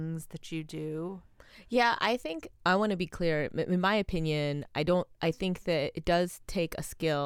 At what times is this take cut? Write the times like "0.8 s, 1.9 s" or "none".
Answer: 2.6 s